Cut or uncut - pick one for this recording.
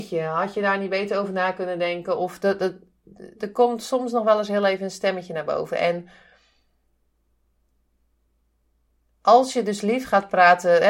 uncut